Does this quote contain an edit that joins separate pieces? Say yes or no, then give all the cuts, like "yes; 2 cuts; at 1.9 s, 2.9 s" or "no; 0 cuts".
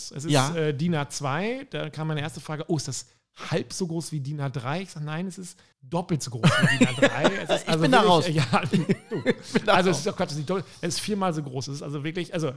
yes; 1 cut; at 5.7 s